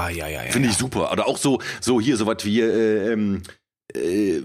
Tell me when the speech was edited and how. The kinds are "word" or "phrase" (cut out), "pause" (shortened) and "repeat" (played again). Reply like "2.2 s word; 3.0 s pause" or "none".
none